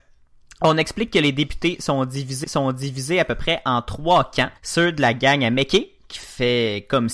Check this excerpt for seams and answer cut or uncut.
cut